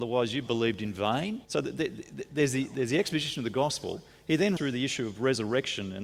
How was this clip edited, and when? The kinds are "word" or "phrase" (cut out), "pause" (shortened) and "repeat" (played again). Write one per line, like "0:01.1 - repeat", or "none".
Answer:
0:01.4 - pause
0:04.6 - word